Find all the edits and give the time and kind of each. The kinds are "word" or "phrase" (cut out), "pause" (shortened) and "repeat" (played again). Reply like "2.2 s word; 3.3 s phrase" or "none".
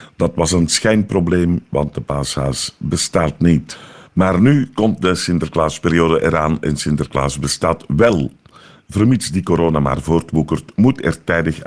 none